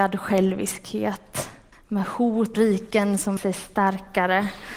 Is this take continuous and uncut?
no; 3 cuts; at 1.7 s, 2.5 s, 3.4 s

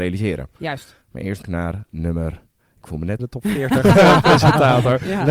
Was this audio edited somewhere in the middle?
yes; 2 cuts; at 1.4 s, 3.2 s

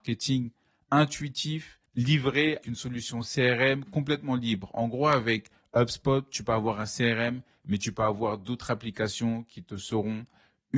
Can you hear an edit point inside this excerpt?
yes; 1 cut; at 2.6 s

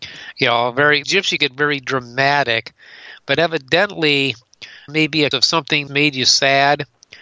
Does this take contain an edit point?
yes; 5 cuts; at 1.0 s, 1.4 s, 4.9 s, 5.3 s, 5.9 s

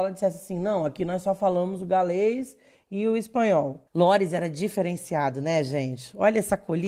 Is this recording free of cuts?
no; 1 cut; at 3.9 s

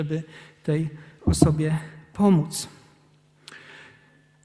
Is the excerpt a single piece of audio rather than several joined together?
yes; 0 cuts

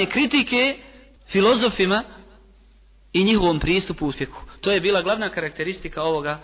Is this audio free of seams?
no; 1 cut; at 4.1 s

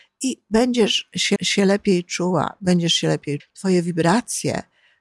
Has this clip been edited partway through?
yes; 2 cuts; at 1.4 s, 3.4 s

